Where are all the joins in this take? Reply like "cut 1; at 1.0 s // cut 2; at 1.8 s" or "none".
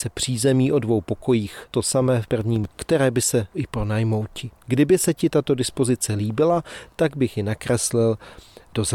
cut 1; at 1.7 s // cut 2; at 2.7 s // cut 3; at 3.5 s // cut 4; at 4.6 s